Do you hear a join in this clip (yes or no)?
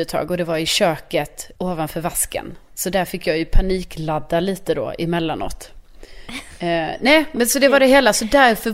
yes